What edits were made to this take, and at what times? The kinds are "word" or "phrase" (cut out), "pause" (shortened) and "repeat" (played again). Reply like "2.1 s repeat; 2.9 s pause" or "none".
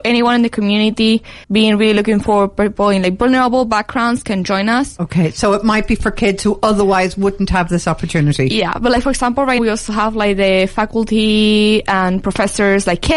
1.4 s pause; 9.6 s word